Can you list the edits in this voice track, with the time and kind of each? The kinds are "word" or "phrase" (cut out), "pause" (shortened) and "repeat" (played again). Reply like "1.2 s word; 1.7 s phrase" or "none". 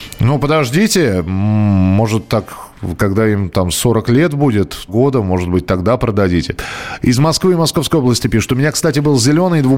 4.9 s phrase